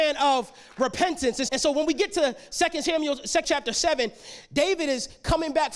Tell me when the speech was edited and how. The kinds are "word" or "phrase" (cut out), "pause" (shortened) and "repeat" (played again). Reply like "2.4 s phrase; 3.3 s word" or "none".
1.5 s word; 3.4 s word